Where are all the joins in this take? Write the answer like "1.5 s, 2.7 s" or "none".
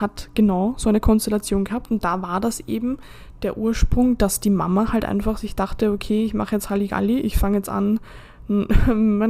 none